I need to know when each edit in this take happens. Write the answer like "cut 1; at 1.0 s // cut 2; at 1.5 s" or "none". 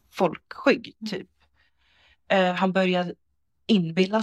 none